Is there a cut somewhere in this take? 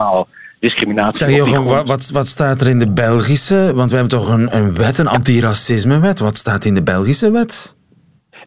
no; 0 cuts

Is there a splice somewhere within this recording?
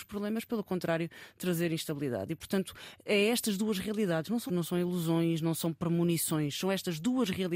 yes; 1 cut; at 4.5 s

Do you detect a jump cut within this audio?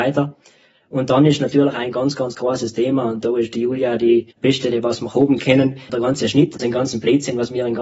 yes; 3 cuts; at 4.3 s, 5.9 s, 6.6 s

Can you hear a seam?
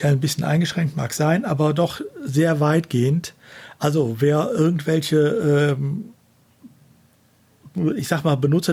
no; 0 cuts

